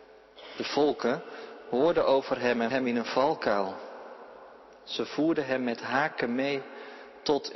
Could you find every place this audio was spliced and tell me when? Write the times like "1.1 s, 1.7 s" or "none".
2.7 s